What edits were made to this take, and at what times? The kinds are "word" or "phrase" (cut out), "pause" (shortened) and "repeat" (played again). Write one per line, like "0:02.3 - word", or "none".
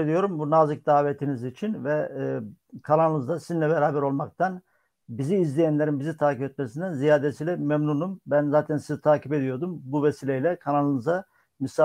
none